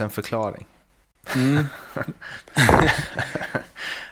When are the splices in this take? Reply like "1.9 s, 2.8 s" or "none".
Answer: 2.5 s